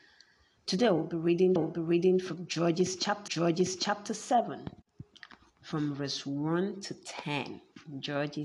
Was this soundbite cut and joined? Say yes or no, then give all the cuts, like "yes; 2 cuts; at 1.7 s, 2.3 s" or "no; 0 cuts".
yes; 2 cuts; at 1.6 s, 3.3 s